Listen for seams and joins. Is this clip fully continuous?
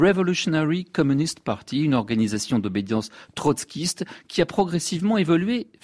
yes; 0 cuts

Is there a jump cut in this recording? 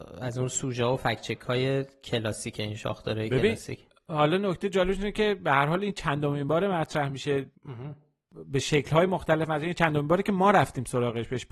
no; 0 cuts

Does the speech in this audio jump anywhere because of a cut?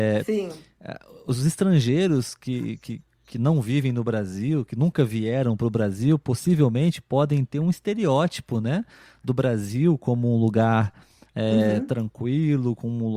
no; 0 cuts

